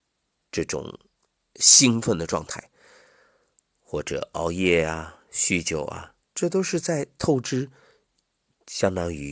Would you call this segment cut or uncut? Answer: cut